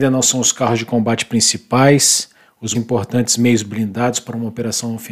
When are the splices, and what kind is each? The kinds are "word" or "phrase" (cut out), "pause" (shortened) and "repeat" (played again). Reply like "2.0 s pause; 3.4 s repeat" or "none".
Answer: 2.7 s word